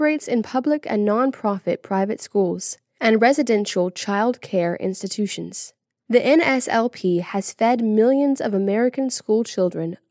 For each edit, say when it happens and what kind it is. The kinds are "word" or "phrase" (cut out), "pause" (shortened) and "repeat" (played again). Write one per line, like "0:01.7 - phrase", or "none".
none